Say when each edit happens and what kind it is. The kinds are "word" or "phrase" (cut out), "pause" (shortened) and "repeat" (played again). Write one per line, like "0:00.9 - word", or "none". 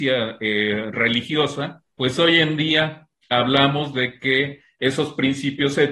0:01.9 - pause